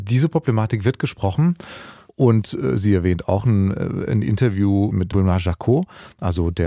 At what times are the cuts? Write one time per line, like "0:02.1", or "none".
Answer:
none